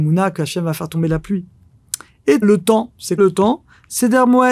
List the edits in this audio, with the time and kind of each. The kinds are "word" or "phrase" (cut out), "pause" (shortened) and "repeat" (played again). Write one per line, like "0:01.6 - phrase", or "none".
0:02.4 - word
0:03.2 - word